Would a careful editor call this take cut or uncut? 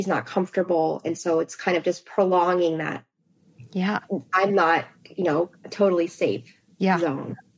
uncut